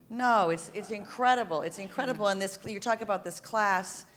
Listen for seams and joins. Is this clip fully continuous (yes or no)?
yes